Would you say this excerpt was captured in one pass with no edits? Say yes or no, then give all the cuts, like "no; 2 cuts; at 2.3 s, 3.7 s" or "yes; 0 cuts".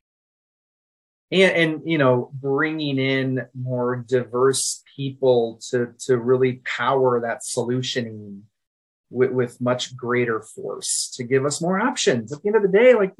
yes; 0 cuts